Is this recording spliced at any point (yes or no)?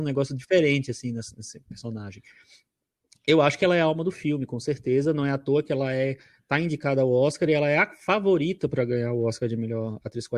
no